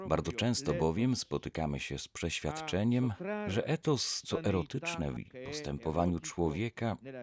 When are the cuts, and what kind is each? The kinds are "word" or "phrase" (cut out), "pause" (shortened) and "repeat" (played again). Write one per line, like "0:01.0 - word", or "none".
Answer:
0:04.2 - word
0:05.2 - word